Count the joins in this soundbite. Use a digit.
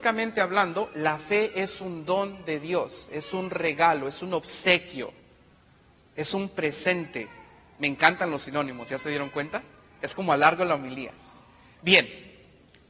0